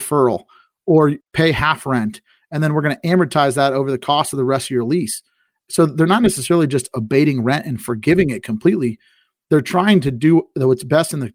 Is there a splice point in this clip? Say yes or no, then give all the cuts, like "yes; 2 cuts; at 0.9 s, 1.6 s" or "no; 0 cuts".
no; 0 cuts